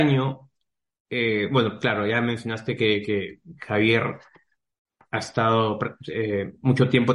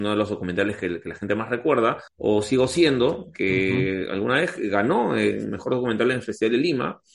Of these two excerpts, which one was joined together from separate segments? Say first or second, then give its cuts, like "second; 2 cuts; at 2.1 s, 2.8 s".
second; 1 cut; at 2.1 s